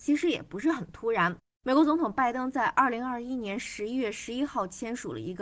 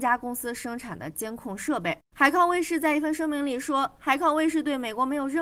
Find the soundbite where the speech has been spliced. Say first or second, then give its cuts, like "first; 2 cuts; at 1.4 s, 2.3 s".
second; 1 cut; at 2.0 s